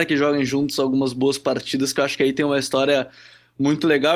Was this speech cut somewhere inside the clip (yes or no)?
no